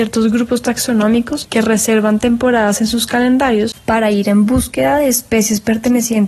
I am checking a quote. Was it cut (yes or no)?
no